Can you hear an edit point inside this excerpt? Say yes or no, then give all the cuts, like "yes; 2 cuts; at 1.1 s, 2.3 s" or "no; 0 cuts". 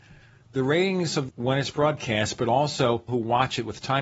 yes; 2 cuts; at 1.3 s, 3.1 s